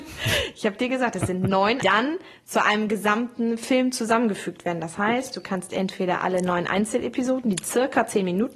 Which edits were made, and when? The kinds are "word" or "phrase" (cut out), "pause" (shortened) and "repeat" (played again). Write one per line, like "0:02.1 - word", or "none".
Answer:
0:01.8 - phrase